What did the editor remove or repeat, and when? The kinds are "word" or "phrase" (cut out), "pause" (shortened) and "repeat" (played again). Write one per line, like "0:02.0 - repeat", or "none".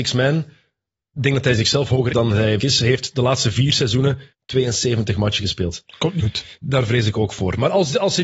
0:02.1 - word
0:02.6 - word
0:04.3 - pause
0:06.2 - word